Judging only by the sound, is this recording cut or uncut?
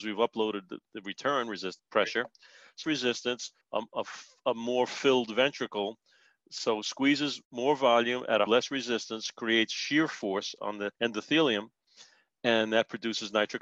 cut